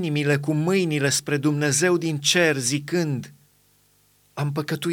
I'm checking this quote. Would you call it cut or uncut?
uncut